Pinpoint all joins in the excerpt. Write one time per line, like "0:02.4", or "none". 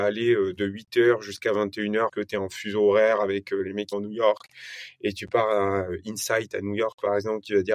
0:02.1
0:03.9